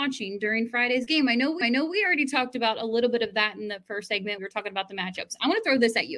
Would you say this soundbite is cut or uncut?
cut